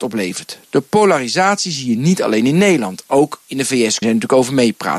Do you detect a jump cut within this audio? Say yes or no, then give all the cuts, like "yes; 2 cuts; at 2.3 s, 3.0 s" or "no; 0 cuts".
yes; 1 cut; at 4.0 s